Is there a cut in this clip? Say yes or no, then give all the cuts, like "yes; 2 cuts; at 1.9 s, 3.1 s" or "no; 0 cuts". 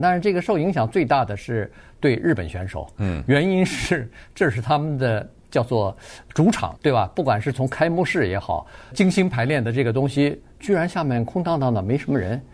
yes; 2 cuts; at 6.8 s, 8.9 s